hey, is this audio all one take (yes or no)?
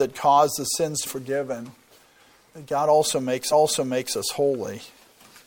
no